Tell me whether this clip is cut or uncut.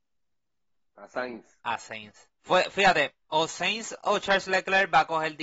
cut